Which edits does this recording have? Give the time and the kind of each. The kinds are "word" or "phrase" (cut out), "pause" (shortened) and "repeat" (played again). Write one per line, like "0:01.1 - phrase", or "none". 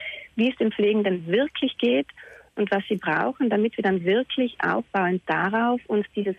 none

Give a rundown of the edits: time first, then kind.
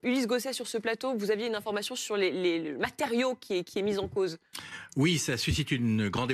none

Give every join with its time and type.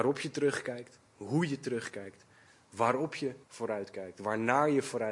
0:01.1 - pause
0:03.4 - pause

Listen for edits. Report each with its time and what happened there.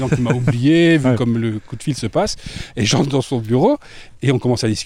none

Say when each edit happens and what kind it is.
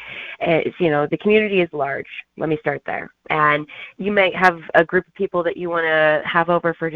none

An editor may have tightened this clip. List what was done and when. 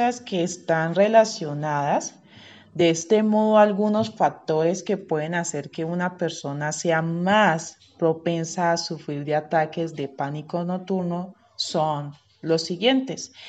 none

